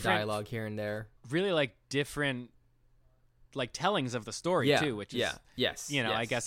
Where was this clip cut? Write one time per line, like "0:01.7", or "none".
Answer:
0:01.2